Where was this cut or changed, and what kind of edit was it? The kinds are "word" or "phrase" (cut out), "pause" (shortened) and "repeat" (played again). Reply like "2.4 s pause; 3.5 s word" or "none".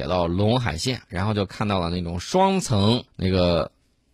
3.1 s pause

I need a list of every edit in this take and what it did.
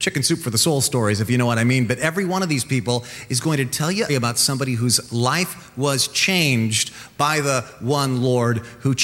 4.1 s word

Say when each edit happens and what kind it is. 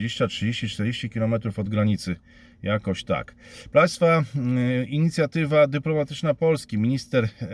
none

